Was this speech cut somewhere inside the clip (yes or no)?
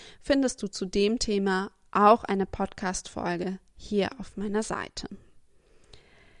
no